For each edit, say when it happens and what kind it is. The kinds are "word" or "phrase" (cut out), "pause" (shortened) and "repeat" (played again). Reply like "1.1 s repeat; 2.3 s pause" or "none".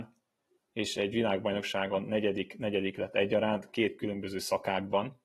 none